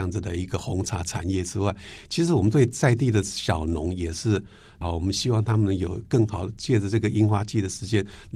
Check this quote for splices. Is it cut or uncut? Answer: uncut